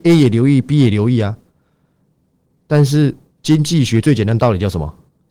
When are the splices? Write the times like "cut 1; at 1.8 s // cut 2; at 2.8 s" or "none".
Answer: none